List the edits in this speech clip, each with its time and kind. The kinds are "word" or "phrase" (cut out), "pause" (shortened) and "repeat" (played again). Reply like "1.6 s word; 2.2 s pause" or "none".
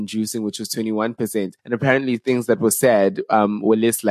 1.6 s pause